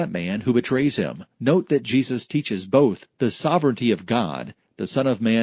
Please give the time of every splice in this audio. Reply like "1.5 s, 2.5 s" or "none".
1.3 s